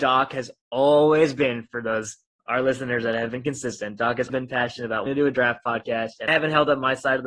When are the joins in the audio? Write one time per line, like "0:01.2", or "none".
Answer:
0:04.3
0:05.1
0:06.3